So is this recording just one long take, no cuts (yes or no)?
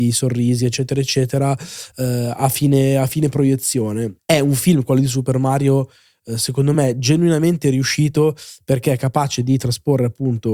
yes